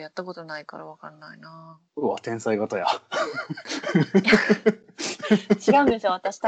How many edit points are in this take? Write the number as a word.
one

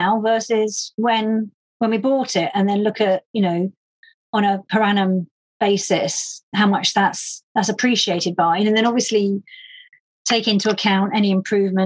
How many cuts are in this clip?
one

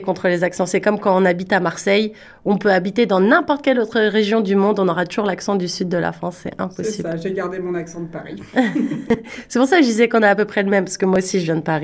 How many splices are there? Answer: zero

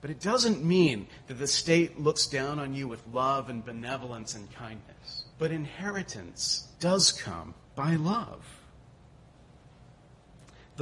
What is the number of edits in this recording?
three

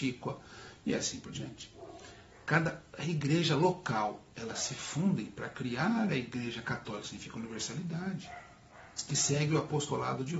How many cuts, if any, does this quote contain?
zero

